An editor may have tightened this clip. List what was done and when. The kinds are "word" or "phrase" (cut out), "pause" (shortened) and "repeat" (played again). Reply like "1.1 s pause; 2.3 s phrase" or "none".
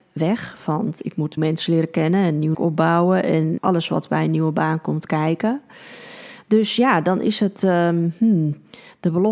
1.4 s phrase; 2.5 s word; 3.6 s word